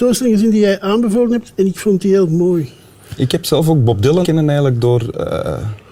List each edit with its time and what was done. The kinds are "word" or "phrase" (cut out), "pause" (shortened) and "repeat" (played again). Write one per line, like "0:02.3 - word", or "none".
0:04.2 - word